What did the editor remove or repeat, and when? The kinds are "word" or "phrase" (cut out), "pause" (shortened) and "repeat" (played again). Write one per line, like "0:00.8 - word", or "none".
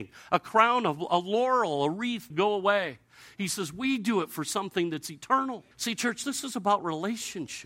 0:02.3 - phrase
0:05.7 - pause